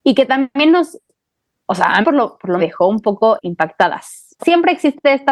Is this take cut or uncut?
cut